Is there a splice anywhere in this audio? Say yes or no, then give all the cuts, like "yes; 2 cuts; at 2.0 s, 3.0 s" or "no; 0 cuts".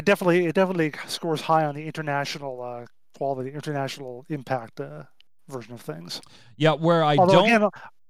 no; 0 cuts